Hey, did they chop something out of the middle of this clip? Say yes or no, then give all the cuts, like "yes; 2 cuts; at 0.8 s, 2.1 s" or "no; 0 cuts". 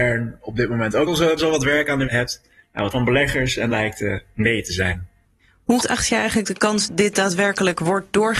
yes; 7 cuts; at 1.1 s, 1.4 s, 2.1 s, 2.9 s, 3.7 s, 5.8 s, 6.9 s